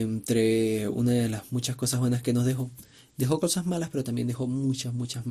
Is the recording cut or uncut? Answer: uncut